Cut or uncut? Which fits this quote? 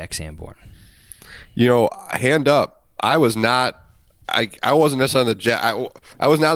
uncut